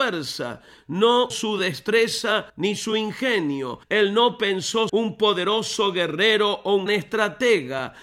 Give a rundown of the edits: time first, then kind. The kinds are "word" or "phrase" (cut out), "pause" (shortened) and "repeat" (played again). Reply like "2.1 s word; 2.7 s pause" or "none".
1.3 s word; 2.5 s pause; 3.8 s pause; 4.9 s word; 6.9 s word